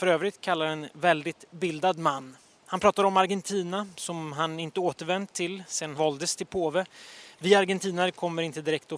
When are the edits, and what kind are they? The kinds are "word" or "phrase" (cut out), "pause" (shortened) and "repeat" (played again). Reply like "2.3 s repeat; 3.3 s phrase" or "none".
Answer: 5.9 s word

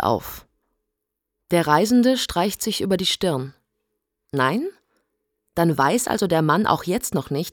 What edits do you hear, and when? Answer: none

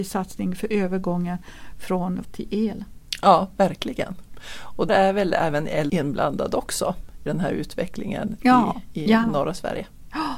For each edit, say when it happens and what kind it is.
2.2 s word; 4.9 s word; 5.9 s word; 7.3 s word

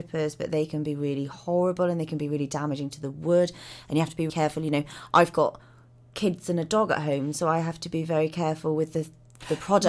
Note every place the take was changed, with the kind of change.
4.3 s word

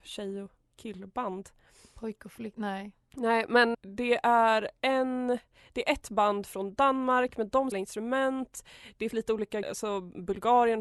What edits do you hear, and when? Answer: 3.7 s word; 7.7 s word; 9.1 s word; 9.6 s word

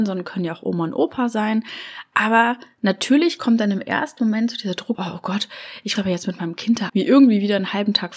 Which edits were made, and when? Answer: 4.9 s word; 6.0 s word; 6.9 s word

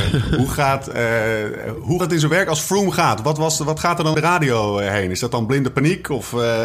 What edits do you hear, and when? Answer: 2.0 s word; 4.1 s word

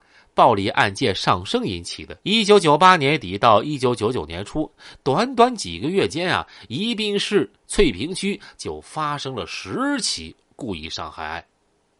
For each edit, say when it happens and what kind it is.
2.2 s pause; 7.6 s pause

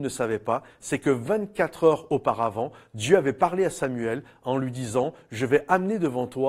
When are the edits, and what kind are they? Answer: none

